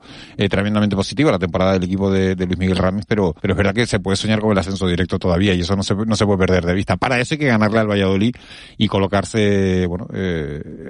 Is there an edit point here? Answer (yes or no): yes